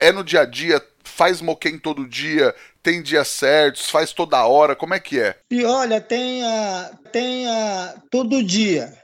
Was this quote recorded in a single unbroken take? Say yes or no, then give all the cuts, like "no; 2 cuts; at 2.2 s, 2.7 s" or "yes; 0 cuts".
no; 1 cut; at 7.1 s